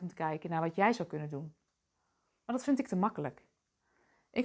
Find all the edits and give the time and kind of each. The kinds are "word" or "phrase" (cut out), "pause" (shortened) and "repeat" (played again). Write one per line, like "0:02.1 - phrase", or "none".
none